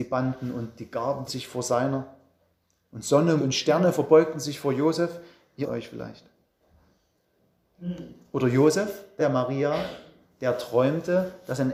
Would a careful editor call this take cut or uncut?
cut